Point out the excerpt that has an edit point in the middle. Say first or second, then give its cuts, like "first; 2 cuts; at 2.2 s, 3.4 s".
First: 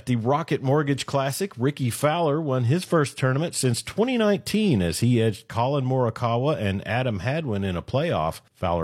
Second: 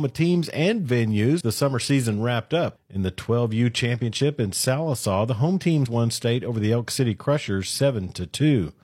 second; 2 cuts; at 1.4 s, 5.9 s